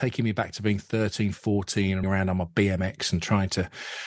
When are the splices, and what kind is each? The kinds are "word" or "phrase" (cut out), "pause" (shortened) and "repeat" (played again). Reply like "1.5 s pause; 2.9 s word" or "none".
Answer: 2.0 s word